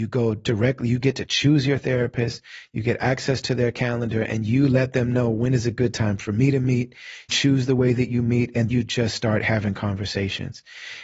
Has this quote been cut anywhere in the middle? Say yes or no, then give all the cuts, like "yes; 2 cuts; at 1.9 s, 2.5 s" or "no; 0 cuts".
yes; 2 cuts; at 7.3 s, 8.7 s